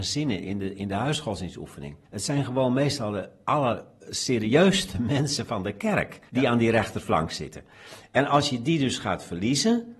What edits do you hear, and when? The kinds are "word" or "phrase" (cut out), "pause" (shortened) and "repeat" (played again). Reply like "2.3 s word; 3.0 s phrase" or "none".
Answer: 2.0 s pause; 6.3 s pause